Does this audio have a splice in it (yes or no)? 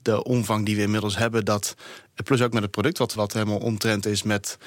yes